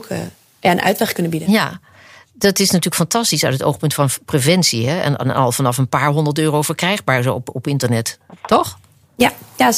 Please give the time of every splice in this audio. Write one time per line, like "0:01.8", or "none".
none